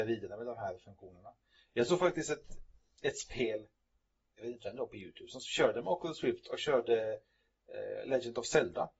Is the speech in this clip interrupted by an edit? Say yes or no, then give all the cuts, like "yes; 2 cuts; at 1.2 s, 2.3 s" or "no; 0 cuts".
no; 0 cuts